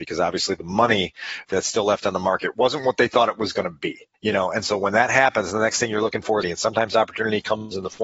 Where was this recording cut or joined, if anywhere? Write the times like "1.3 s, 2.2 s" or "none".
1.5 s, 4.1 s, 6.4 s